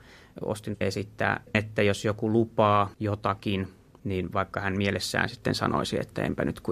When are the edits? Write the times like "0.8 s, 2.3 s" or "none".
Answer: 1.5 s, 2.9 s

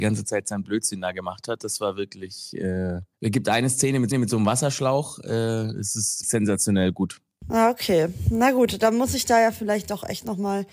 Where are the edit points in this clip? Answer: 3.1 s, 4.1 s, 6.2 s

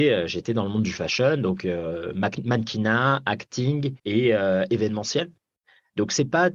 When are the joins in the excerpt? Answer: 4.0 s

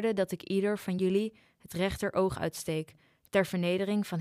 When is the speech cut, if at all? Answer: none

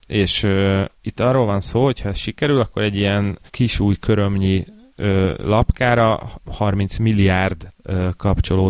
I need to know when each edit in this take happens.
1.0 s, 3.5 s, 6.4 s

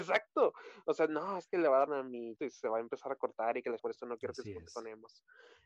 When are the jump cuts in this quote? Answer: 1.9 s, 2.4 s, 3.8 s

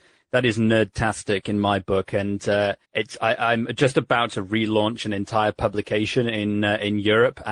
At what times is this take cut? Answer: 2.8 s

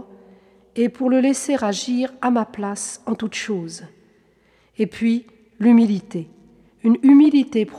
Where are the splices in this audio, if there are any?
none

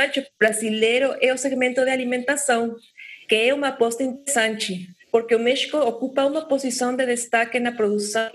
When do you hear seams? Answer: 3.2 s, 5.0 s

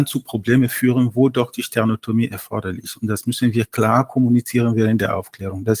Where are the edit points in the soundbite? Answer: none

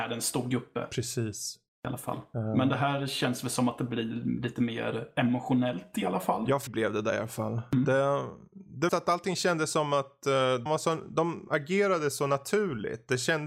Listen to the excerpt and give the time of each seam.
1.7 s, 6.7 s, 8.9 s, 10.7 s

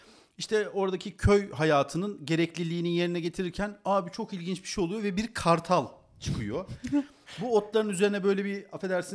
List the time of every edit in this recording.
none

